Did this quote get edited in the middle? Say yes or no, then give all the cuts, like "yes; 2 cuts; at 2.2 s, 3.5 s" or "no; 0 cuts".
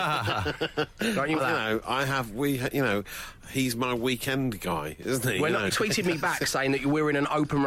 yes; 2 cuts; at 1.4 s, 5.7 s